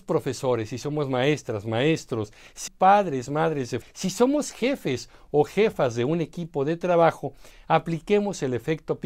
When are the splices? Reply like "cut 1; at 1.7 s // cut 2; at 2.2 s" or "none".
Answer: cut 1; at 2.7 s // cut 2; at 3.8 s

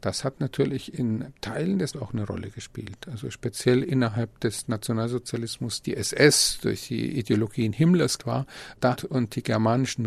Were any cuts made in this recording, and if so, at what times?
cut 1; at 1.9 s // cut 2; at 5.8 s // cut 3; at 8.2 s // cut 4; at 9.0 s

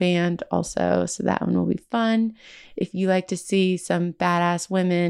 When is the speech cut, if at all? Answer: none

